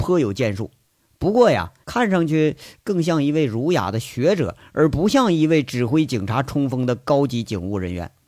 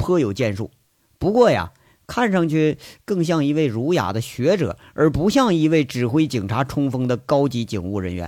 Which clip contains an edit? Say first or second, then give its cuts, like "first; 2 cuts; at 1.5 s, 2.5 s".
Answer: first; 1 cut; at 1.8 s